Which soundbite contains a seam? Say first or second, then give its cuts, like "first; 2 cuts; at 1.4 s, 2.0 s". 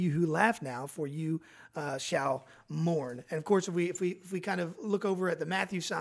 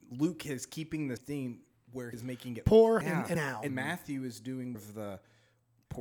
second; 6 cuts; at 1.2 s, 2.1 s, 3.0 s, 3.3 s, 3.7 s, 4.7 s